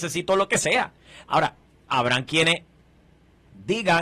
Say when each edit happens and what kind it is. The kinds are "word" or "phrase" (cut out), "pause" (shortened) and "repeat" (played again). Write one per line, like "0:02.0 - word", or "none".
none